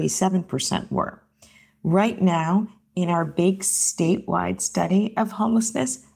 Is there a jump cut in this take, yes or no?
no